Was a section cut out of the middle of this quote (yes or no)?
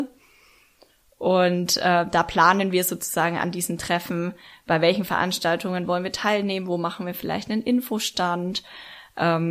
no